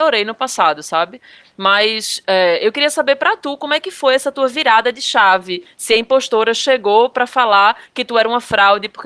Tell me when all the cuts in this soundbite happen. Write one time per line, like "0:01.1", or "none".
none